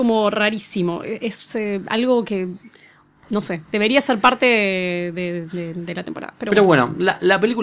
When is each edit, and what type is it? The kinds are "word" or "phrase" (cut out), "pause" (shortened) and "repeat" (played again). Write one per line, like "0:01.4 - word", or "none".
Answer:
none